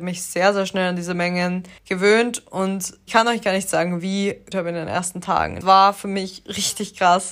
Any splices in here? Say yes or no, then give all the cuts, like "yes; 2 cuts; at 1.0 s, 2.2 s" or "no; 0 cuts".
yes; 4 cuts; at 1.8 s, 3.1 s, 4.5 s, 5.6 s